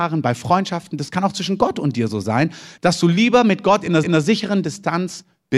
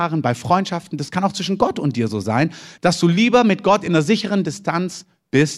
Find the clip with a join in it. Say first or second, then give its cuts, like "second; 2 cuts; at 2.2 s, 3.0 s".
first; 1 cut; at 4.0 s